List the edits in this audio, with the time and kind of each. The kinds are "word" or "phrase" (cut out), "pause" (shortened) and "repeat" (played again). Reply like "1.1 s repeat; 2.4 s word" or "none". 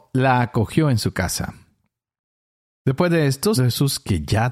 3.6 s word